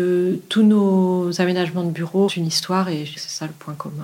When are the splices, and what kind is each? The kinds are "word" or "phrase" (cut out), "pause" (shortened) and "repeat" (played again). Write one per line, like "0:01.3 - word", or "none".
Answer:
0:02.3 - word
0:03.1 - word